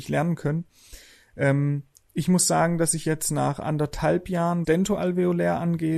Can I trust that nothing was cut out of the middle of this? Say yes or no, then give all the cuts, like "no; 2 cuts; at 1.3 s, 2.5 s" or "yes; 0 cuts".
no; 1 cut; at 4.6 s